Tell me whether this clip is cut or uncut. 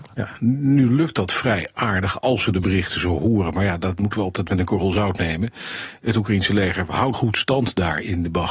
cut